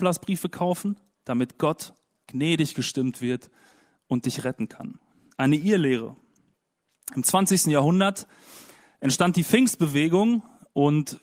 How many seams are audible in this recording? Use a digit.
0